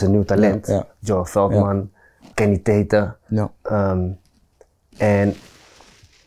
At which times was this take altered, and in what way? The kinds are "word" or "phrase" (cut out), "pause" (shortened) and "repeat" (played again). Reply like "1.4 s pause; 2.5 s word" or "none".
2.3 s word